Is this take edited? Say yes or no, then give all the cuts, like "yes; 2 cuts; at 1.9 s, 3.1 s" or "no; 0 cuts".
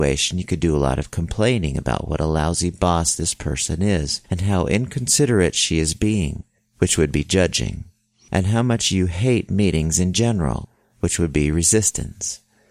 no; 0 cuts